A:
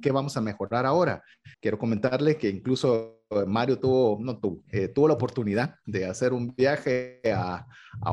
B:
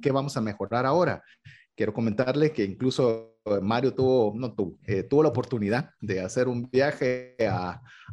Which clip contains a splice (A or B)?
A